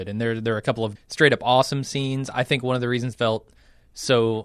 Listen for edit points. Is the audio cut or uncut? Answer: cut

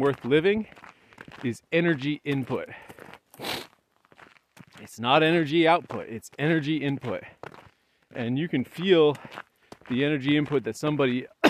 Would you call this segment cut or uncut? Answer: uncut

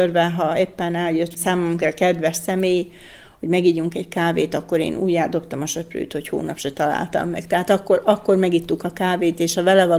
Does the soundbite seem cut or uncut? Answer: uncut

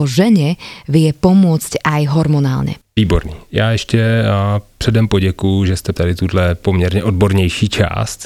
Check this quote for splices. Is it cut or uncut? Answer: cut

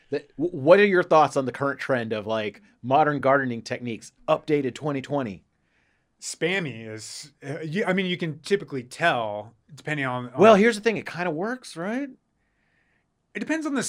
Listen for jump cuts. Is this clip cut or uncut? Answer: uncut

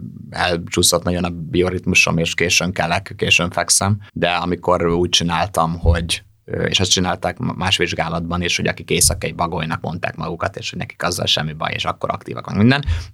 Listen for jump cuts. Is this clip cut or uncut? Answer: cut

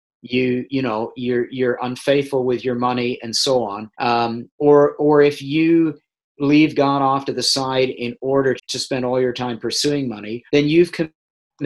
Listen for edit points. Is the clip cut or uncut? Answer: cut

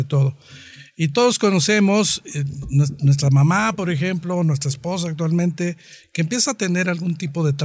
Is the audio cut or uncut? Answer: uncut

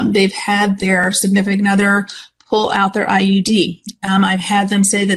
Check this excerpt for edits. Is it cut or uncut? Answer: uncut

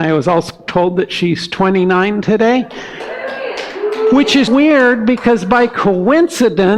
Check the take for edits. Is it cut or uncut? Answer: cut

